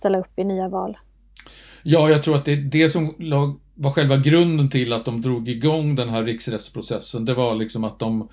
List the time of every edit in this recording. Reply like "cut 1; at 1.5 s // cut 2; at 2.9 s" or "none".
none

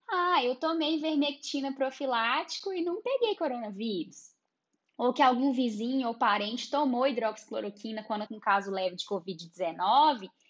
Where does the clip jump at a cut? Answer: cut 1; at 8.3 s

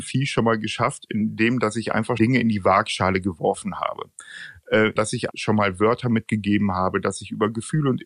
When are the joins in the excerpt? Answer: cut 1; at 2.2 s // cut 2; at 5.0 s // cut 3; at 5.3 s

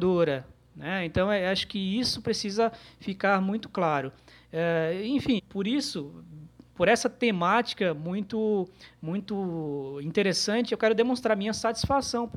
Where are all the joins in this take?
cut 1; at 5.4 s

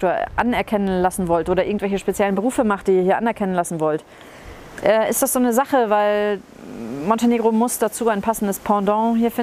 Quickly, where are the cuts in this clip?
none

